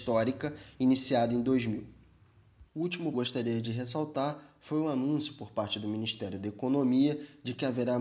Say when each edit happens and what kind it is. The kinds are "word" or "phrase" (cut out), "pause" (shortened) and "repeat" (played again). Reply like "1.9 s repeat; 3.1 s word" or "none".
2.7 s pause; 3.1 s phrase